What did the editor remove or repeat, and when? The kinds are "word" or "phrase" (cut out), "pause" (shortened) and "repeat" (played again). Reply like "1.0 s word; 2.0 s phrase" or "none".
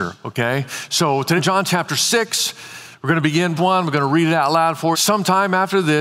1.4 s word; 3.6 s word; 4.9 s word